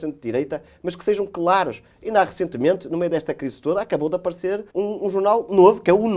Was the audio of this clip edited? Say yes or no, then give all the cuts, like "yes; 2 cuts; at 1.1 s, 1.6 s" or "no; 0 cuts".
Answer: yes; 1 cut; at 4.7 s